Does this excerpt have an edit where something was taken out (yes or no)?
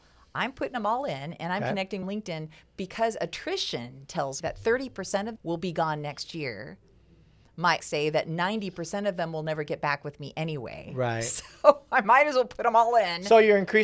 yes